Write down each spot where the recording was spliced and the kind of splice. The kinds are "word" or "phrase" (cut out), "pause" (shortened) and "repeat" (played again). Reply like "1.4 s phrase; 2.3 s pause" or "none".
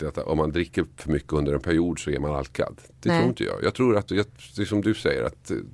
4.1 s word